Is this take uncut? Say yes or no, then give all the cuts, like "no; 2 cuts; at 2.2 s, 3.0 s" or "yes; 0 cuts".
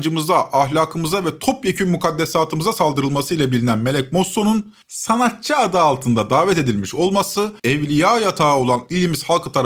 no; 2 cuts; at 4.8 s, 7.6 s